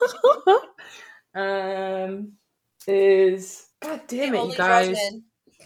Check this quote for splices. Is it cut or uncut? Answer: cut